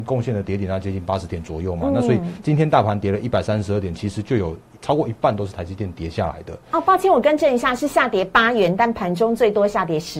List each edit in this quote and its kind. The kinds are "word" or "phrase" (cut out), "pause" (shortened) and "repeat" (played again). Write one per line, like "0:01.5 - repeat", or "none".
none